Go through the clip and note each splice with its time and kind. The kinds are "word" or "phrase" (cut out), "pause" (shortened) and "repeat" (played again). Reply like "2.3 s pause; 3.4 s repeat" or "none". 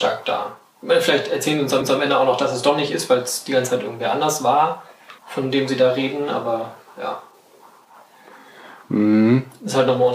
1.8 s repeat; 5.2 s pause; 8.8 s pause